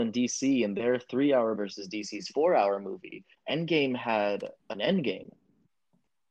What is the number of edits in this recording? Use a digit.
2